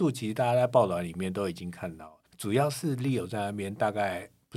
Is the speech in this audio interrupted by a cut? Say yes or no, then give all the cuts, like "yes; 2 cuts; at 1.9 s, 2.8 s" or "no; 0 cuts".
yes; 1 cut; at 2.3 s